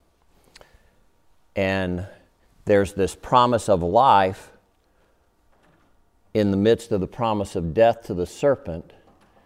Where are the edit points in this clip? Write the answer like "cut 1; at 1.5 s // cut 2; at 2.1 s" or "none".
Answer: none